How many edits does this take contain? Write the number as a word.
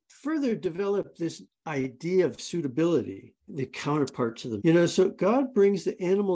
two